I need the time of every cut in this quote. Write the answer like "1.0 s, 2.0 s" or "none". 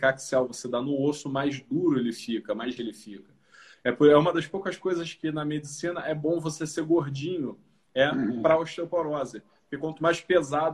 2.8 s